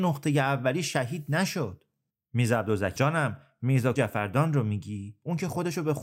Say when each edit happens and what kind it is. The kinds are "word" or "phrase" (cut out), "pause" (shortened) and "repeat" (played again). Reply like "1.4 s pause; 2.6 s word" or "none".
3.0 s word; 4.0 s word